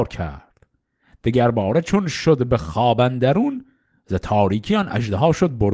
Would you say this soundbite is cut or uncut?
uncut